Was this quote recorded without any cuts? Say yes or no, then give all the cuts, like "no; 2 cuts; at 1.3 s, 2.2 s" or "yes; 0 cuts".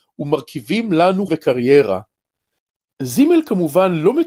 no; 1 cut; at 1.3 s